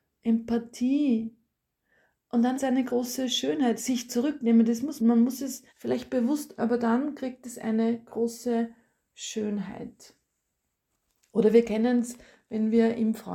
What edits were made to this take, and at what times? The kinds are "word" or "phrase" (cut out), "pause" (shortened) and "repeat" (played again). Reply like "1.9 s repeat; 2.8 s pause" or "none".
2.5 s word; 3.8 s phrase; 4.1 s word; 5.0 s phrase; 5.7 s pause; 6.6 s word